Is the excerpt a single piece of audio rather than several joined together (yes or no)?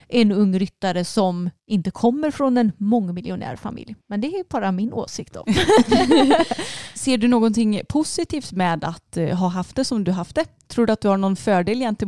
no